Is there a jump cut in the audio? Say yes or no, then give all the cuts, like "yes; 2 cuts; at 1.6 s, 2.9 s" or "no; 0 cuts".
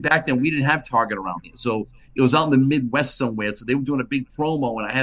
no; 0 cuts